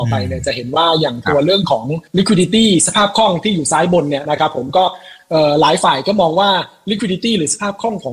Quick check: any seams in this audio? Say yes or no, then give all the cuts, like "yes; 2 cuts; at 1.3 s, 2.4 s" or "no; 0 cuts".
yes; 1 cut; at 2.1 s